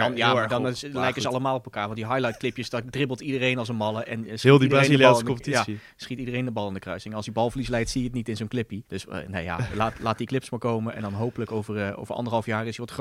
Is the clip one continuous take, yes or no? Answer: no